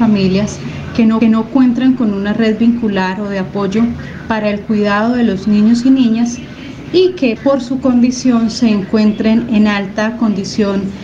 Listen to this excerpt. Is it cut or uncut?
cut